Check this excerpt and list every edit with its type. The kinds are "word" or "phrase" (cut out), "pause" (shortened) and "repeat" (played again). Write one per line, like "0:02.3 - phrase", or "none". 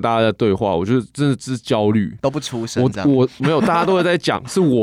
none